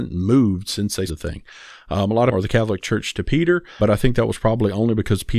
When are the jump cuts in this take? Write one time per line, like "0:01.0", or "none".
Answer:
0:01.1
0:02.3
0:03.8